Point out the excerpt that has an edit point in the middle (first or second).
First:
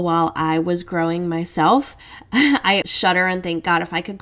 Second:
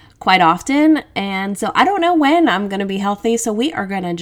first